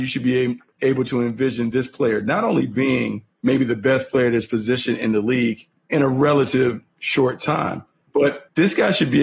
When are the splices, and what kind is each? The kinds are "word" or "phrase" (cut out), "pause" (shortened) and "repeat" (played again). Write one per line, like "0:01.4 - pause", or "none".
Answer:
none